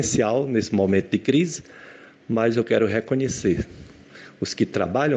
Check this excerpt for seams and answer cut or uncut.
uncut